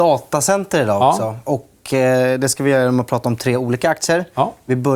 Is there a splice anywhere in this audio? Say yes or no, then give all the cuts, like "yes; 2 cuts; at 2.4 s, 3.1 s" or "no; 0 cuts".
no; 0 cuts